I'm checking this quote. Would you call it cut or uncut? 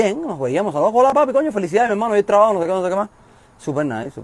uncut